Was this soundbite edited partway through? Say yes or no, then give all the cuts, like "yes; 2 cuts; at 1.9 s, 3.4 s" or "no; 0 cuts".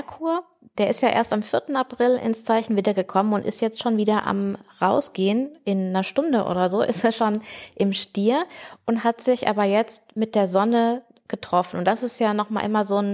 no; 0 cuts